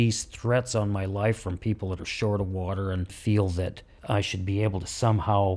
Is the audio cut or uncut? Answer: uncut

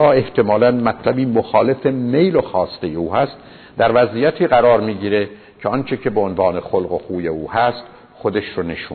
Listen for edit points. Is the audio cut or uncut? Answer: uncut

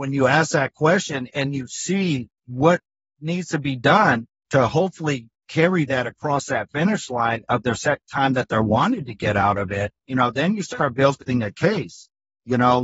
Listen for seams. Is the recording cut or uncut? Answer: cut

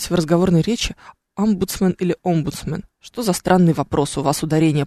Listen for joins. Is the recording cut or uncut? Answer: uncut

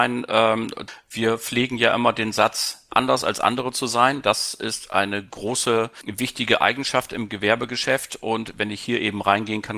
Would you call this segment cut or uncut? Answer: uncut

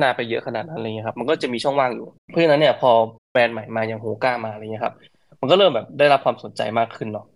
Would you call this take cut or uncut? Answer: cut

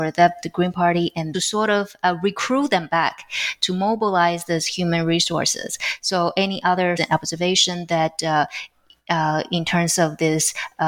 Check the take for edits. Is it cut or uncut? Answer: cut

